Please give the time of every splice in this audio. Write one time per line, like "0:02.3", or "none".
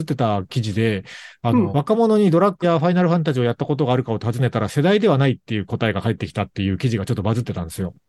0:01.7
0:02.6